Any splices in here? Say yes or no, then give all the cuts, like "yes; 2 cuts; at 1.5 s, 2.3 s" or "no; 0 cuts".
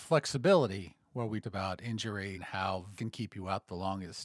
yes; 3 cuts; at 1.4 s, 2.3 s, 3.0 s